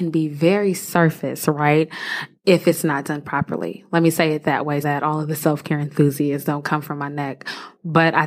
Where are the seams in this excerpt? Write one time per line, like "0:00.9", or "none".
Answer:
0:02.4
0:04.8